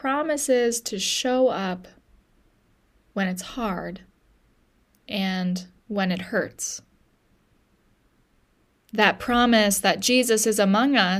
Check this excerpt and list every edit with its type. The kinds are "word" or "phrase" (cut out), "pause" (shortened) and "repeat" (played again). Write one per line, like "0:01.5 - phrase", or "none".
none